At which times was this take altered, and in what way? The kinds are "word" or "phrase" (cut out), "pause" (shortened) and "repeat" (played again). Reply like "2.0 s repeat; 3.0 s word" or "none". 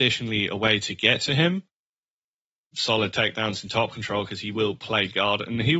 none